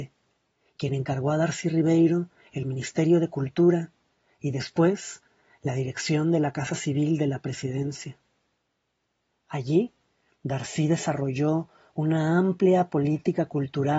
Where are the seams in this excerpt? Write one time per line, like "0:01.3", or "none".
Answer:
none